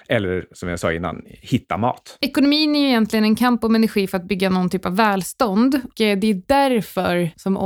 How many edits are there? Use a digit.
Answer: 1